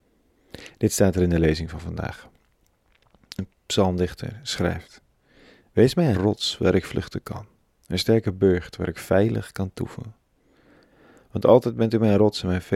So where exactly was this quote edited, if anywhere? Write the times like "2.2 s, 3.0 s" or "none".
6.1 s